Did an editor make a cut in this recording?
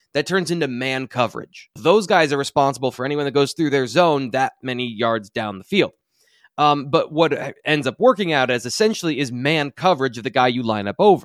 yes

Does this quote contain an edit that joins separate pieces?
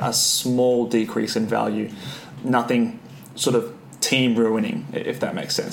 no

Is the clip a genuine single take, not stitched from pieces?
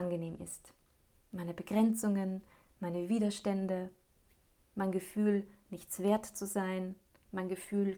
yes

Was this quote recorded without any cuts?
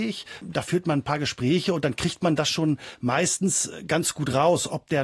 yes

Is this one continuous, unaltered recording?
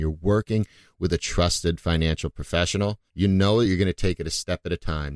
no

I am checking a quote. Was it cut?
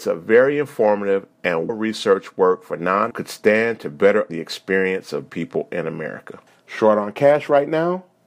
yes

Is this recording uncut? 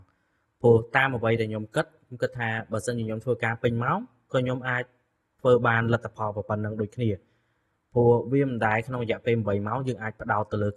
yes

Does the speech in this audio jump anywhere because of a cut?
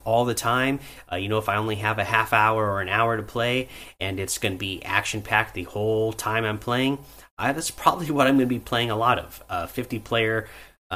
no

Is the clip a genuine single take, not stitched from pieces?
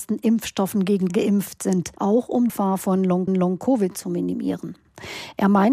no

